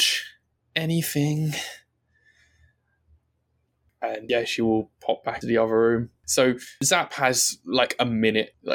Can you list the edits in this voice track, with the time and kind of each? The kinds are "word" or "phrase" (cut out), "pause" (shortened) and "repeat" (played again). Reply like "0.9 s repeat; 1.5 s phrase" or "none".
5.4 s word